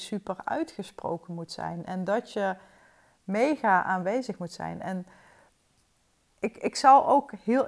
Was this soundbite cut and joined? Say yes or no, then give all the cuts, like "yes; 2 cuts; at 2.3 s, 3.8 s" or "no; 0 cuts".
no; 0 cuts